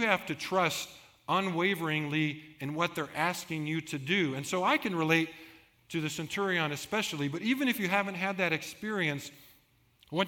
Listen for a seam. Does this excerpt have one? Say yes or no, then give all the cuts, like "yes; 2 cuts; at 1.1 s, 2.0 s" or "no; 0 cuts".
no; 0 cuts